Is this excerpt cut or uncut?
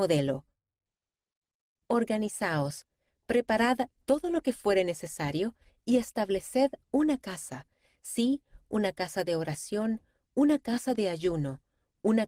uncut